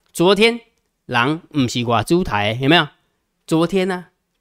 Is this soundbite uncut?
yes; 0 cuts

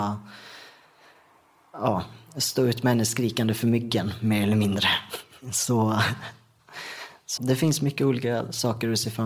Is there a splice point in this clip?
yes; 1 cut; at 7.4 s

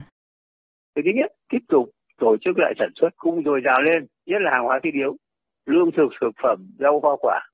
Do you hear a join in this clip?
yes; 2 cuts; at 1.4 s, 3.1 s

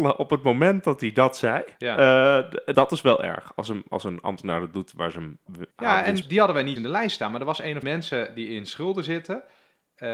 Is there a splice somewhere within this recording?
yes; 6 cuts; at 1.7 s, 2.7 s, 5.7 s, 6.2 s, 6.8 s, 7.8 s

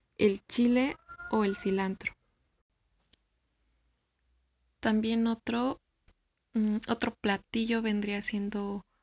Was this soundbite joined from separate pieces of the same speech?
no; 0 cuts

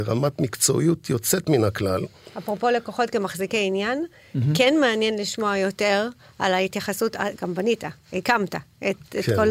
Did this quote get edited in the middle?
no; 0 cuts

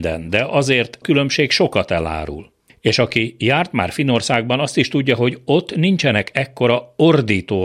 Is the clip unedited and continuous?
no; 2 cuts; at 1.0 s, 2.7 s

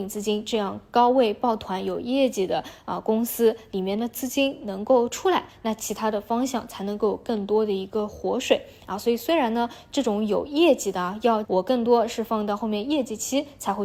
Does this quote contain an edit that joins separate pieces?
yes; 1 cut; at 11.4 s

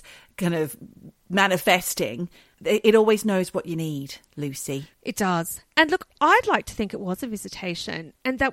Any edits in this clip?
no; 0 cuts

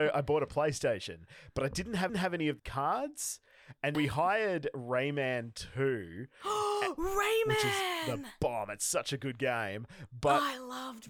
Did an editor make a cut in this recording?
yes; 3 cuts; at 2.1 s, 2.6 s, 3.9 s

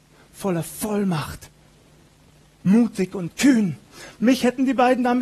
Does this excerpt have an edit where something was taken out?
no; 0 cuts

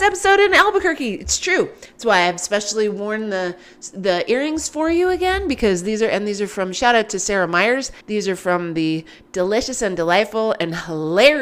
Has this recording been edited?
yes; 1 cut; at 8.0 s

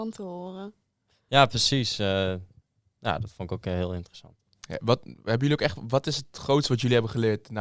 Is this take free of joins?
yes; 0 cuts

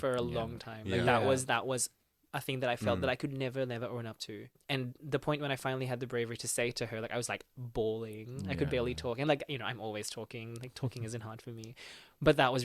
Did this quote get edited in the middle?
no; 0 cuts

